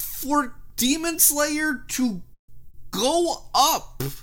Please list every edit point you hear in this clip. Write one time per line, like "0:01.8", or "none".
none

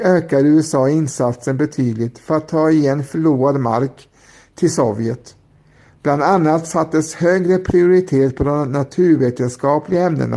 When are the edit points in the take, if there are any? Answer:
none

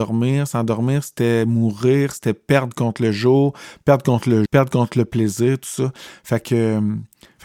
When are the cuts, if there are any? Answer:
0:04.5

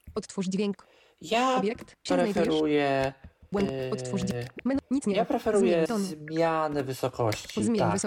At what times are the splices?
0:02.1
0:03.5
0:05.9

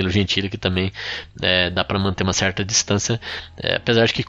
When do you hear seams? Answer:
none

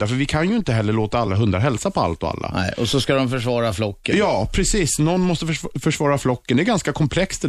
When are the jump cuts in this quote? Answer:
none

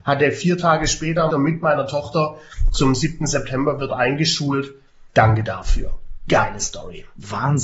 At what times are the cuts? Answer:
0:01.3
0:03.9
0:05.1

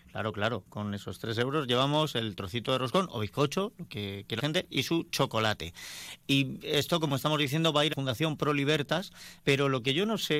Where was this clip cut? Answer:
0:04.4
0:07.9
0:09.4

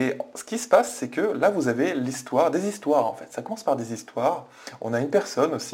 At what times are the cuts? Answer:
none

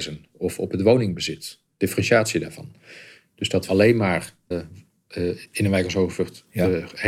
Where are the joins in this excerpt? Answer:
0:03.7
0:04.5

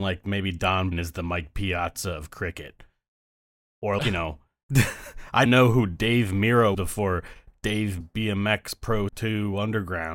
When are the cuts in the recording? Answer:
0:00.9
0:04.0
0:05.5
0:06.7
0:08.0
0:09.1

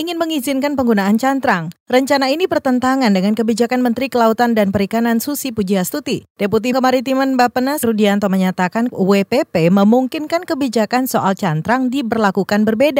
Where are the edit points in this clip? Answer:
0:06.7
0:07.8
0:08.9

